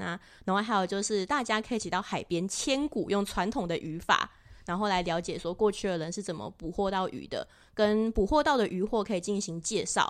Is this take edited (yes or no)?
no